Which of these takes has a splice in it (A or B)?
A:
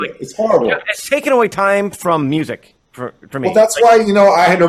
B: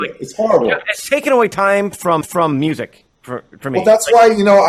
B